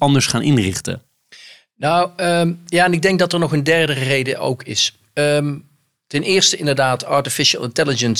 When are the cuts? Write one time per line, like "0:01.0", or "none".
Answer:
none